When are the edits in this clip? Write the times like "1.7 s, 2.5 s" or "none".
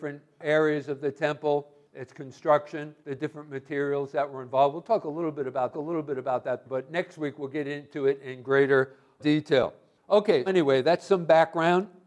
3.0 s, 5.7 s, 10.5 s